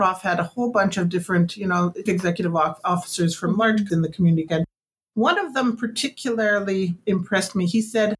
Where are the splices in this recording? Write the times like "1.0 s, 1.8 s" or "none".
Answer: 2.1 s, 3.9 s, 4.5 s